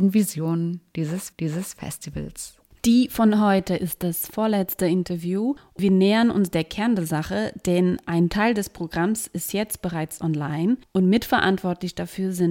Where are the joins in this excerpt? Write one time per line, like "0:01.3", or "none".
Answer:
0:01.3